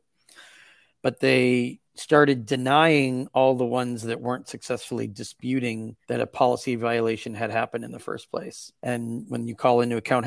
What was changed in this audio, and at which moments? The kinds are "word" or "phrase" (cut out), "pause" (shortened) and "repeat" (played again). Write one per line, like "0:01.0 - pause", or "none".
0:01.9 - pause
0:06.0 - pause
0:08.8 - pause